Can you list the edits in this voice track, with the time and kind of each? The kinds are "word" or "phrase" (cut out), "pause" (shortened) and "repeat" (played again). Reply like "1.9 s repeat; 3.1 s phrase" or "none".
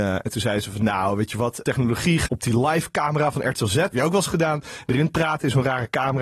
1.6 s phrase; 2.3 s phrase; 3.9 s word; 4.9 s word